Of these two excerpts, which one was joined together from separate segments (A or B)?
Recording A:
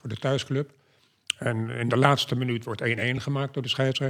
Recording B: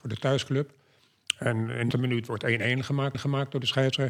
B